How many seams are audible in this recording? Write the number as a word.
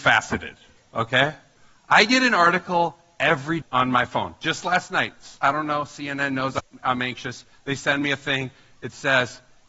one